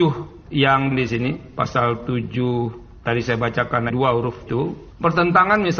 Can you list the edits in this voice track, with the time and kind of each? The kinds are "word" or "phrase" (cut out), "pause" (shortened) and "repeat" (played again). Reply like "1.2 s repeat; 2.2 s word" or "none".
0.9 s word; 3.0 s word; 3.9 s word; 4.5 s word